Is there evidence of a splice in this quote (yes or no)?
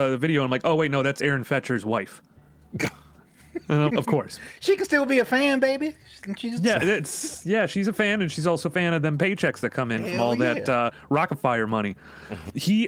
yes